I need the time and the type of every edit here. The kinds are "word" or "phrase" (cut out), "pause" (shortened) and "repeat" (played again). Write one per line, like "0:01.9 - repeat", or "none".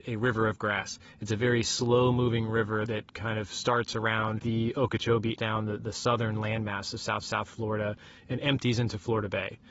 0:05.4 - phrase
0:07.2 - repeat